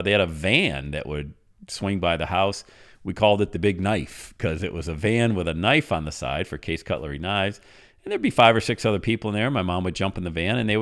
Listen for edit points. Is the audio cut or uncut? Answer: uncut